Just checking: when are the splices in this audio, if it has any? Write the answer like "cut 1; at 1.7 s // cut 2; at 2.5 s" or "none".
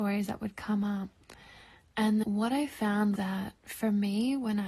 cut 1; at 2.2 s // cut 2; at 3.2 s